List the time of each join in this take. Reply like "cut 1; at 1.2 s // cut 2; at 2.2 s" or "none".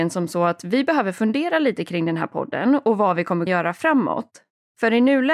cut 1; at 3.5 s